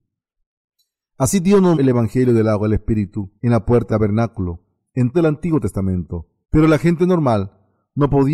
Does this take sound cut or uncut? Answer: cut